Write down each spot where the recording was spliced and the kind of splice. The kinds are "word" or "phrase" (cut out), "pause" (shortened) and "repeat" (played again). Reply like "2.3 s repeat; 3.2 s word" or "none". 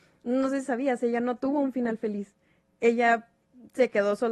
none